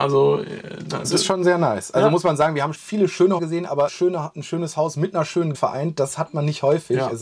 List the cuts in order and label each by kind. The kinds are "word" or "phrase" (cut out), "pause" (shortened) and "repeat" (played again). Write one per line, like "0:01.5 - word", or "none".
0:01.0 - word
0:02.7 - word
0:03.4 - word
0:03.9 - word
0:05.5 - word

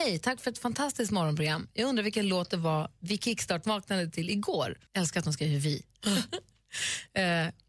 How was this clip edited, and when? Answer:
0:04.9 - pause

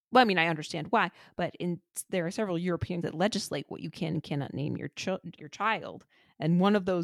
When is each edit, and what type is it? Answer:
0:03.0 - word
0:05.4 - word

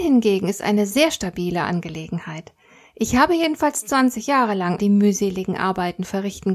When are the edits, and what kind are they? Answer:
0:04.8 - word

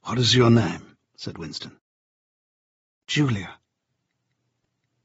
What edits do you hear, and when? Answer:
0:01.1 - pause

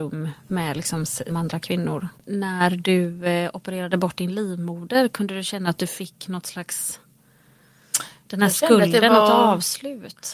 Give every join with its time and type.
0:01.3 - word
0:02.2 - pause

